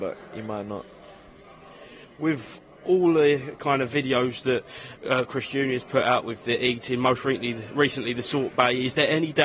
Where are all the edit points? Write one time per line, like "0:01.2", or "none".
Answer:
none